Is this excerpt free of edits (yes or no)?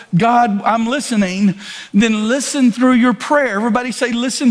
yes